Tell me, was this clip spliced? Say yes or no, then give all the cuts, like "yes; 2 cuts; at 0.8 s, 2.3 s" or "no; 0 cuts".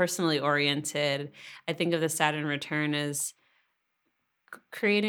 no; 0 cuts